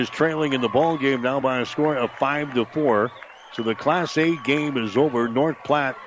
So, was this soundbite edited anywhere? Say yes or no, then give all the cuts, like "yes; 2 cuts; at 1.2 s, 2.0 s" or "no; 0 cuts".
no; 0 cuts